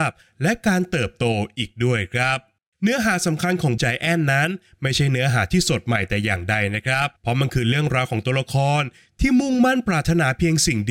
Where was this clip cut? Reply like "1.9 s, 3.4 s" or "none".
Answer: 2.6 s, 3.8 s, 7.2 s